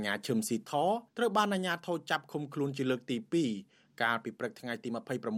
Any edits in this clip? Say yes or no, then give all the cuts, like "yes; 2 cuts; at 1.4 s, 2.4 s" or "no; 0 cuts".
yes; 1 cut; at 1.1 s